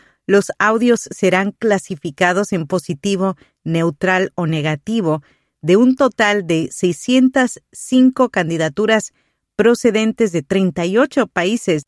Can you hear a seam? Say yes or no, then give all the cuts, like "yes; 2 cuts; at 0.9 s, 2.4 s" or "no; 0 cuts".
no; 0 cuts